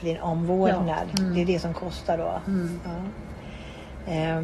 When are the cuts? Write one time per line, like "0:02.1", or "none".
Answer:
none